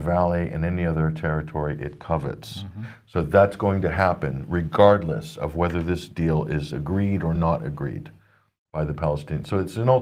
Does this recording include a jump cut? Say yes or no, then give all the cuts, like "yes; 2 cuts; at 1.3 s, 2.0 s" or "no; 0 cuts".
no; 0 cuts